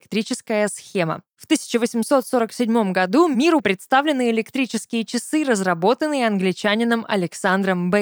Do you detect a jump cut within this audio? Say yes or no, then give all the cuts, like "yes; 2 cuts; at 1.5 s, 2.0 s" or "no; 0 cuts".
yes; 1 cut; at 3.6 s